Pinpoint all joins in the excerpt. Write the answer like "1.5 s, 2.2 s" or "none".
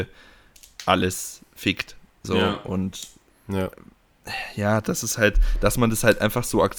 none